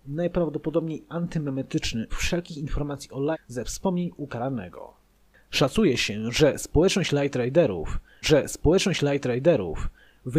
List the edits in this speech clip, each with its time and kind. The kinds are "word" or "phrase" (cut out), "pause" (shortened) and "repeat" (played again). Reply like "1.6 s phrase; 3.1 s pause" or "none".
2.1 s word; 3.3 s word; 8.2 s repeat